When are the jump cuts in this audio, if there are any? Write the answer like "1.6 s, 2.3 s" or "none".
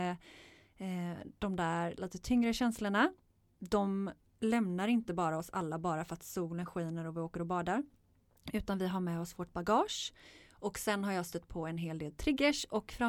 none